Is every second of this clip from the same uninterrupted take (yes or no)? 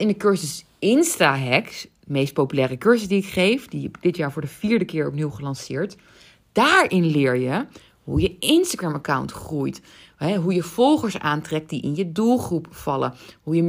yes